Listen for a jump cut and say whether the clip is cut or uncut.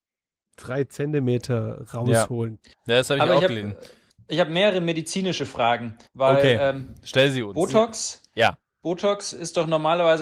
cut